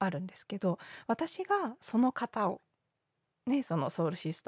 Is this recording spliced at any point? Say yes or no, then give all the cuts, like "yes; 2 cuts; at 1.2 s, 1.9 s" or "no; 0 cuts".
no; 0 cuts